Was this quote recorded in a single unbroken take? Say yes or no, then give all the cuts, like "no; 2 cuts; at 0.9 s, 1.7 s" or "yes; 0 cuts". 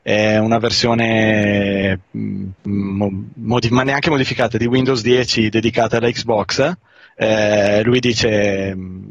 no; 1 cut; at 2.6 s